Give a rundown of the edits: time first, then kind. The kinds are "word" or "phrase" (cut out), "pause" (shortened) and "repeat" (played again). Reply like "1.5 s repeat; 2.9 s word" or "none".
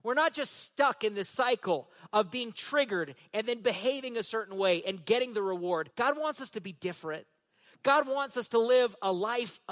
5.9 s pause

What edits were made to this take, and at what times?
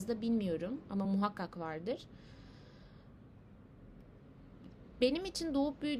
none

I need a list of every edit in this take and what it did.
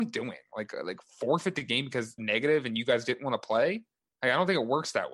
2.2 s phrase

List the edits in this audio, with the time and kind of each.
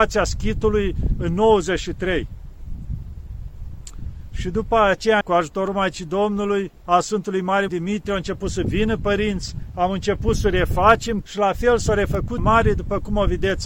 5.2 s word; 6.8 s pause; 7.7 s word; 11.2 s word; 12.4 s phrase

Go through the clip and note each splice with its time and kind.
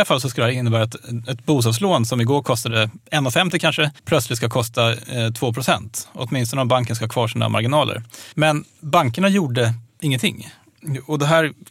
3.0 s pause; 4.0 s pause; 8.3 s pause; 9.9 s pause

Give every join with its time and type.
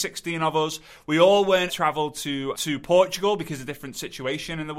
1.7 s phrase; 2.5 s word

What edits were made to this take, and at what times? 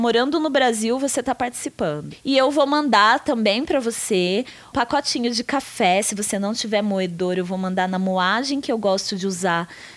4.7 s word

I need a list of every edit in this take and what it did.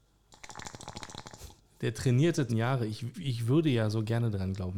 1.6 s pause; 2.5 s phrase; 3.1 s word

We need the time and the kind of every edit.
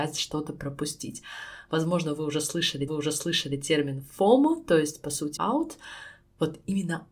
2.9 s repeat; 5.4 s phrase

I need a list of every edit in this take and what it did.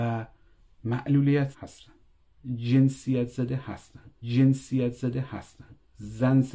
1.5 s word; 4.2 s repeat

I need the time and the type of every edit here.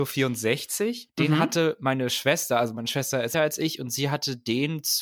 3.3 s phrase

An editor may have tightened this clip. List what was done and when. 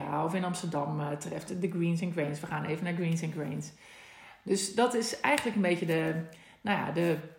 none

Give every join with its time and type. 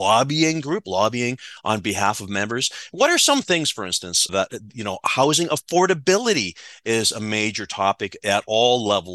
4.3 s word

